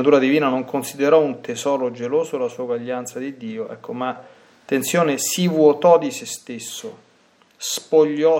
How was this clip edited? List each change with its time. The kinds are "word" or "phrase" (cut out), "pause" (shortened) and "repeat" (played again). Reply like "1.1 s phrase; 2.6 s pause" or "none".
none